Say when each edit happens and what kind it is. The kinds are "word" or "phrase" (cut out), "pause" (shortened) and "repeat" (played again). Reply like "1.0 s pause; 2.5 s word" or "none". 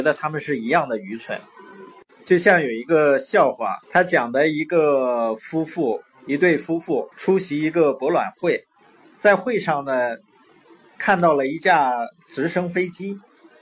3.8 s pause; 7.1 s pause; 8.8 s pause